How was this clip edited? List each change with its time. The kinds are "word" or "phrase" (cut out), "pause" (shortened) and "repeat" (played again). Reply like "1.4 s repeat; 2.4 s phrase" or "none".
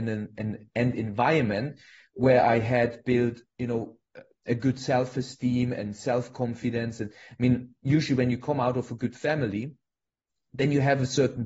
none